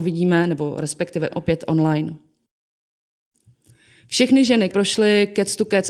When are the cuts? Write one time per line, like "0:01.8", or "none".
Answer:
0:01.3
0:04.7